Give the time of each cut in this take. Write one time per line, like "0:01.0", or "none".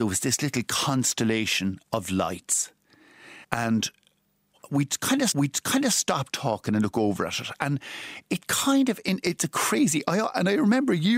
0:03.4
0:05.3